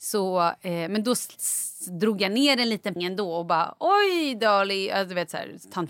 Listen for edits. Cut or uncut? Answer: cut